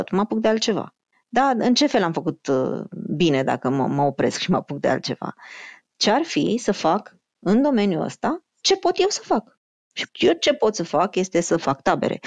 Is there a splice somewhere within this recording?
yes; 2 cuts; at 1.1 s, 10.1 s

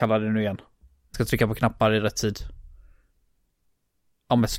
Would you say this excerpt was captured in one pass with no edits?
no; 1 cut; at 1.1 s

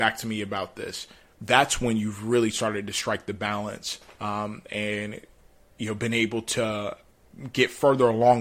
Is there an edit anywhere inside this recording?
no; 0 cuts

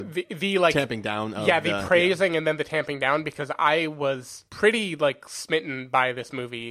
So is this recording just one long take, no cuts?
no; 1 cut; at 4.5 s

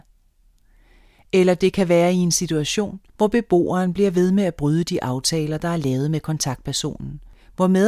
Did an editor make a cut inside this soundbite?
yes; 1 cut; at 3.1 s

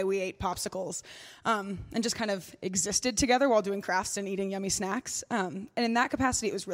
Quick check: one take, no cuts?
yes; 0 cuts

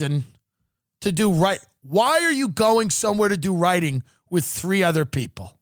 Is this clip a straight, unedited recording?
yes; 0 cuts

